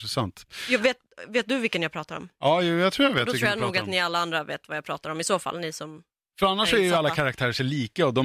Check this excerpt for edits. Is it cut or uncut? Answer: uncut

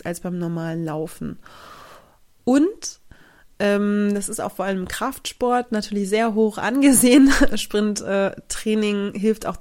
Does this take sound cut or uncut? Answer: uncut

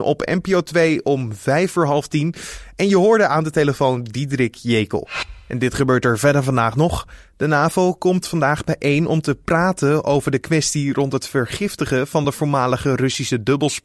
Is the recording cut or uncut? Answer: uncut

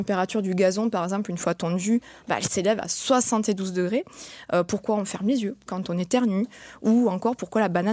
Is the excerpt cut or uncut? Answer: uncut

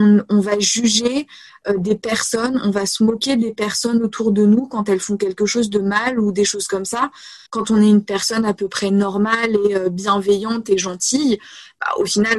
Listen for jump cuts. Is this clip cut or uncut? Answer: cut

